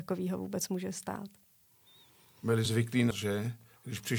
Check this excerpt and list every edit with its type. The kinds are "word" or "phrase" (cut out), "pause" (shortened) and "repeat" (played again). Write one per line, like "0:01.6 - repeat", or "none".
0:02.7 - word
0:03.1 - word